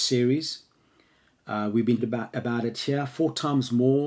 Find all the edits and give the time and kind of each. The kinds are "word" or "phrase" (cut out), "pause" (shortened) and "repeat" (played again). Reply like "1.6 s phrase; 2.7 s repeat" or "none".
2.0 s word; 2.3 s word